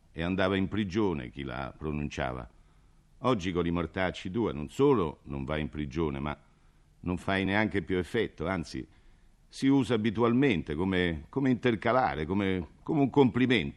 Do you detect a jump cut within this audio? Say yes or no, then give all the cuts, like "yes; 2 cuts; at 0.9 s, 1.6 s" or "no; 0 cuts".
no; 0 cuts